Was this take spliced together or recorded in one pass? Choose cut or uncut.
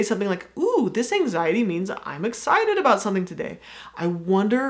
uncut